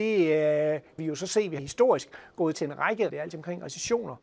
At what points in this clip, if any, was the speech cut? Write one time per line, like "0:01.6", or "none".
0:01.0
0:01.6
0:02.5
0:03.1